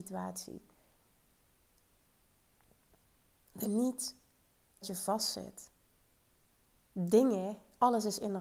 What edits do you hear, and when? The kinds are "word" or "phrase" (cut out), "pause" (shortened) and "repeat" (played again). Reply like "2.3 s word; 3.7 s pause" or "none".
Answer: 3.6 s word; 4.8 s word